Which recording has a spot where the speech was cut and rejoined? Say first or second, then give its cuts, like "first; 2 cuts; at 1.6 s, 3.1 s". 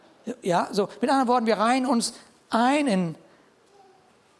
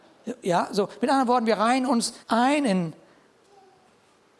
second; 1 cut; at 2.2 s